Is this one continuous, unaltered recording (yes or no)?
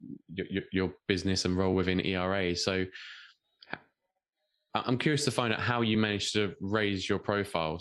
yes